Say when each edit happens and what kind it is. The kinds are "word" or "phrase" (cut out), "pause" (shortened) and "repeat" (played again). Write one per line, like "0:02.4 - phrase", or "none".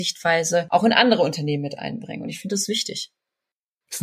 none